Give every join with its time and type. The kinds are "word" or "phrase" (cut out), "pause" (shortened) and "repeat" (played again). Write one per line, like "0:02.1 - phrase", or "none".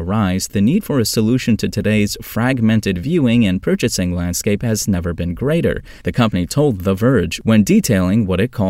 none

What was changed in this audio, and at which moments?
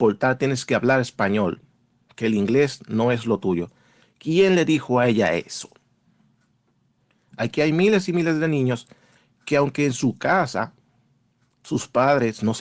none

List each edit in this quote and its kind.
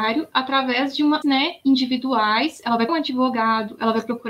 0:01.2 - phrase
0:02.9 - word

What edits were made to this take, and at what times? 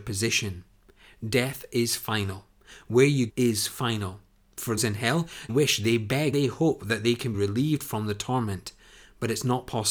0:03.3 - word
0:04.8 - word
0:05.5 - word
0:06.3 - word
0:07.3 - word

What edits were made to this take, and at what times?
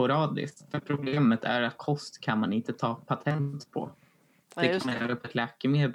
none

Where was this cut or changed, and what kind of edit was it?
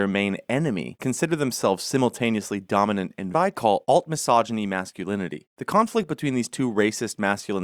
0:01.0 - word
0:03.3 - phrase

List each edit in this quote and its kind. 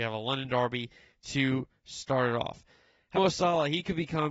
0:03.1 - word

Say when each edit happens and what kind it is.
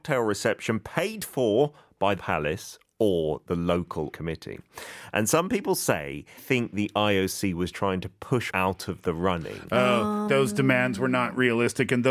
0:02.2 - word
0:04.1 - word
0:06.4 - word
0:07.7 - word
0:08.5 - word
0:10.3 - word

